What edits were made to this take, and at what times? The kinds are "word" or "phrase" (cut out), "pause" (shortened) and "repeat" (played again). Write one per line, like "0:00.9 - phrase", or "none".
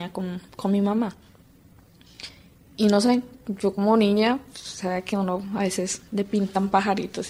none